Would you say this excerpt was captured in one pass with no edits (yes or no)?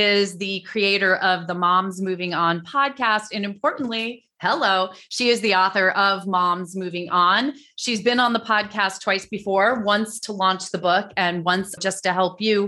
no